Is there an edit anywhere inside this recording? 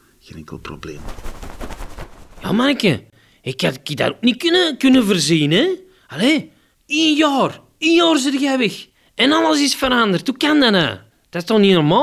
no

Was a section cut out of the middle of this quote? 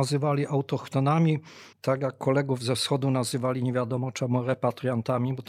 yes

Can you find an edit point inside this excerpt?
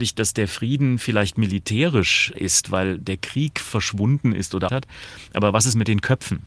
yes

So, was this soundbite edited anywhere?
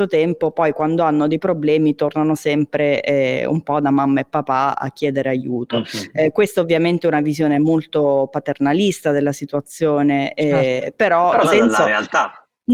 yes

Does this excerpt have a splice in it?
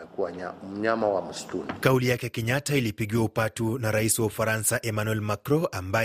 no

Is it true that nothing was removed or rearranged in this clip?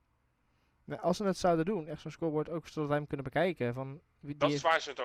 yes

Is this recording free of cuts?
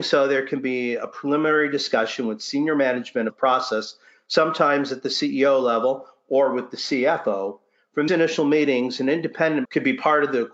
no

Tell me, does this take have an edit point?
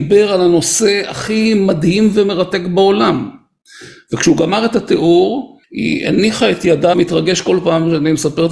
yes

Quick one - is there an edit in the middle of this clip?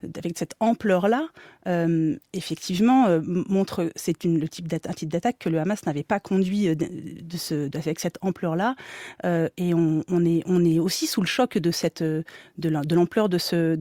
no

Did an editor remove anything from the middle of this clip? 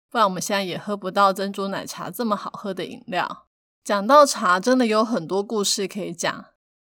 no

